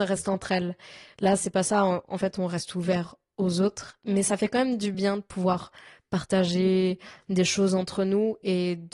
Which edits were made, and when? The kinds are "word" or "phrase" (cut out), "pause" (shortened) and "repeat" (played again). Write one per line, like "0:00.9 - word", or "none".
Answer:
none